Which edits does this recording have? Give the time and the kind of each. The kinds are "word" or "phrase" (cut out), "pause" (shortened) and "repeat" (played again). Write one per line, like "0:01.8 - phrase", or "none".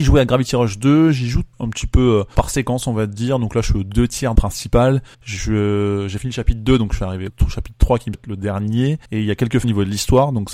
0:01.5 - pause
0:02.3 - word
0:04.3 - phrase
0:05.1 - pause
0:07.3 - word
0:08.1 - word
0:09.0 - pause
0:09.6 - phrase